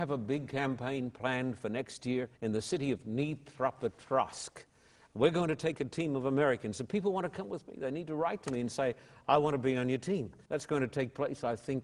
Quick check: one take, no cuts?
no; 2 cuts; at 2.4 s, 10.5 s

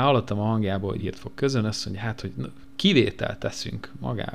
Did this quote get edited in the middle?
yes; 1 cut; at 1.0 s

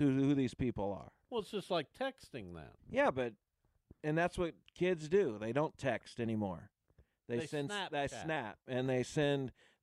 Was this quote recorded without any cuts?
no; 2 cuts; at 1.2 s, 2.8 s

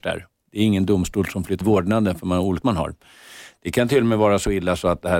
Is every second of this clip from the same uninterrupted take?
no; 2 cuts; at 1.6 s, 2.6 s

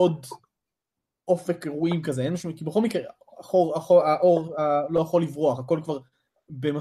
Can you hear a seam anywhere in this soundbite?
no; 0 cuts

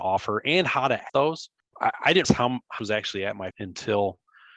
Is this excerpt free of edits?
no; 4 cuts; at 1.1 s, 2.2 s, 2.8 s, 3.5 s

